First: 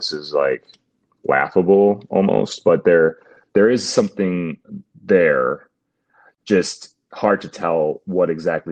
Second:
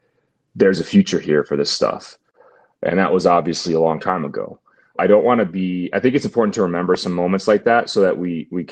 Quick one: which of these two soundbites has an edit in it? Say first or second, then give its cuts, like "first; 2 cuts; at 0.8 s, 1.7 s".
second; 1 cut; at 4.9 s